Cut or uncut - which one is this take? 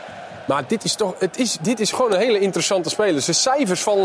uncut